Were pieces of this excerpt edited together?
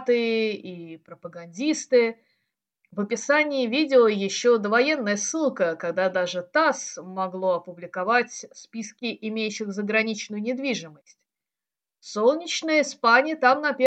no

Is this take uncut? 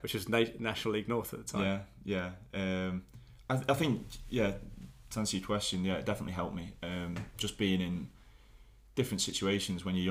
yes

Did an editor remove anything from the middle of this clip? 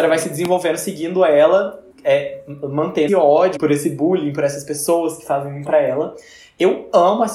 yes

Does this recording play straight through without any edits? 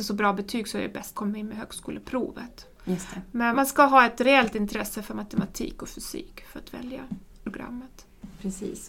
no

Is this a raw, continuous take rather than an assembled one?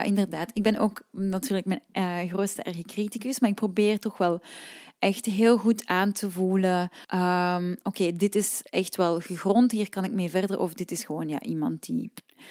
no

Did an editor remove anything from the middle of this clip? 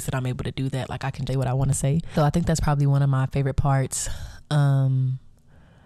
yes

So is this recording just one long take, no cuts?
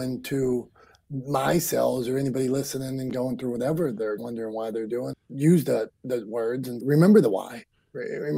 no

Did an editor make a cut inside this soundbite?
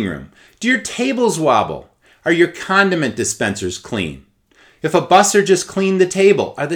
no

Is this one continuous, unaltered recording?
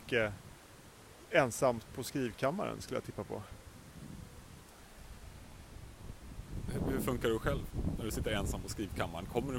yes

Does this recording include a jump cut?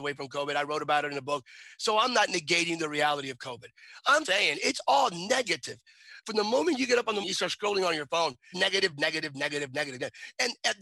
yes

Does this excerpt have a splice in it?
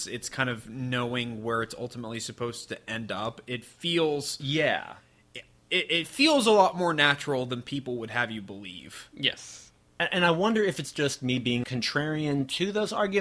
yes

